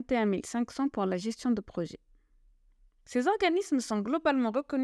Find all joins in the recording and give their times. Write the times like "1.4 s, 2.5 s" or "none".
none